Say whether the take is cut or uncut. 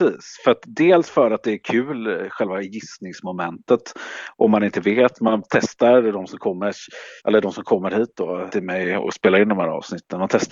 cut